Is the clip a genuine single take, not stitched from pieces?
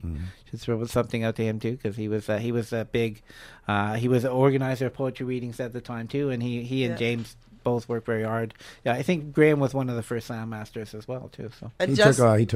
yes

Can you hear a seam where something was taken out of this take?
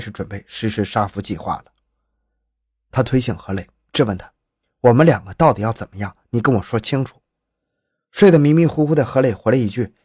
no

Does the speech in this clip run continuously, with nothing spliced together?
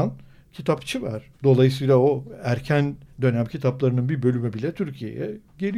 no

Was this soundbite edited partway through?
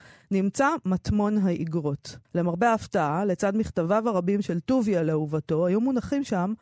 yes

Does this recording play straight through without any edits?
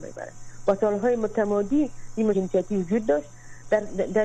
no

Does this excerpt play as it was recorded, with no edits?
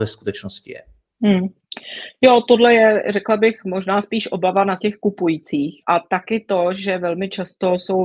no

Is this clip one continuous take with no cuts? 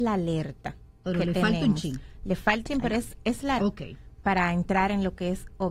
no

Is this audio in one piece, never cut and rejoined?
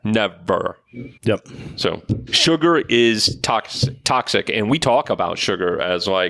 no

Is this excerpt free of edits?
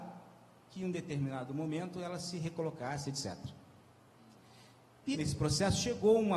no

